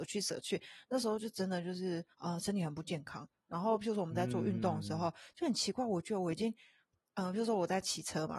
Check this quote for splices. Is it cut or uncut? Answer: cut